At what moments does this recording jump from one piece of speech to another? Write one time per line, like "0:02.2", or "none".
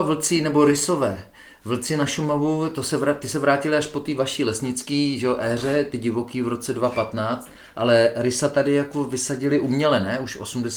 none